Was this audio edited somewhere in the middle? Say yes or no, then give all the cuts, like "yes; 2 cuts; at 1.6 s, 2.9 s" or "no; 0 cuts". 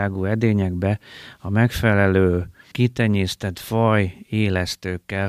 no; 0 cuts